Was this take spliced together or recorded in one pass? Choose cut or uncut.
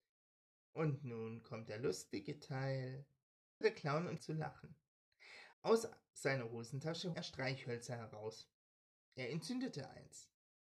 cut